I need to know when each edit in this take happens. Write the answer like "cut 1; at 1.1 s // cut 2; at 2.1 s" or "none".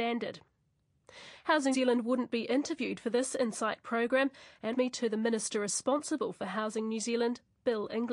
cut 1; at 1.7 s // cut 2; at 4.7 s